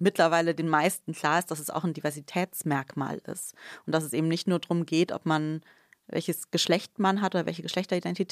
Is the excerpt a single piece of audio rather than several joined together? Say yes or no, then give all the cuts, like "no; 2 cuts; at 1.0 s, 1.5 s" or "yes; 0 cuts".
yes; 0 cuts